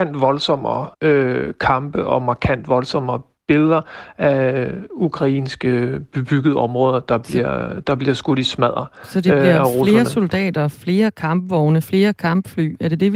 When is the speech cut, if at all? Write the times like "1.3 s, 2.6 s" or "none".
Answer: 0.9 s